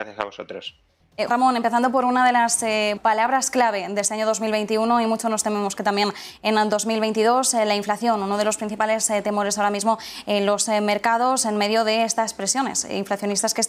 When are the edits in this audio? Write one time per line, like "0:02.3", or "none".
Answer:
0:01.3
0:03.0